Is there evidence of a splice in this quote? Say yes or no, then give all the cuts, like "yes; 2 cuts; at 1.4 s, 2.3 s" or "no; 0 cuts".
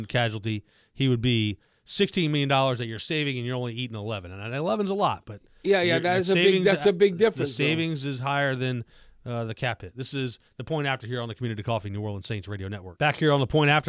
no; 0 cuts